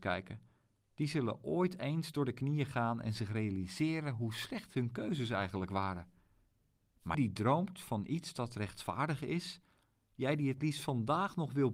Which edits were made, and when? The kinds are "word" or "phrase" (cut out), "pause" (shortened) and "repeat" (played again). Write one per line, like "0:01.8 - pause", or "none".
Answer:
0:07.1 - phrase